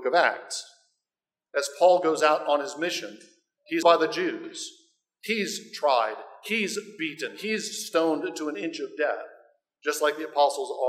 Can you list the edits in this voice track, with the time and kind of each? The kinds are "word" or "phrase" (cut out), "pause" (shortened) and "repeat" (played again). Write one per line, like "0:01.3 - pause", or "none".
0:03.8 - word